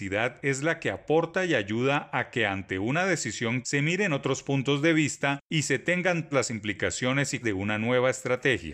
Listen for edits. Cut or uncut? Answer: cut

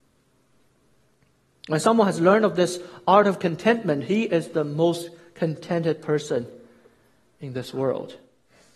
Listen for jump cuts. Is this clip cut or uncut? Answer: uncut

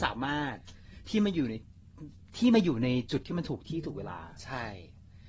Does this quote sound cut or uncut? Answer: uncut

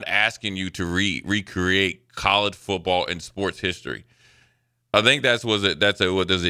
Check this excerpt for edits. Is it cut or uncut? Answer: uncut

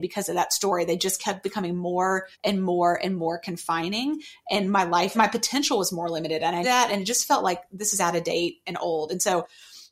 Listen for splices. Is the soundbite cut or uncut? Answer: cut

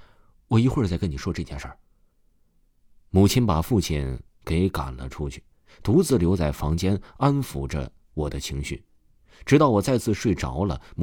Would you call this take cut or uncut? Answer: uncut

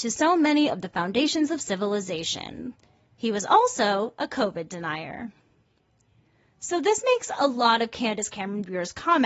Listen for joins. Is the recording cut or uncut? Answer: uncut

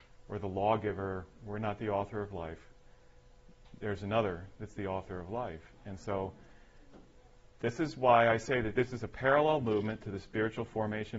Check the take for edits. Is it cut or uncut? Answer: cut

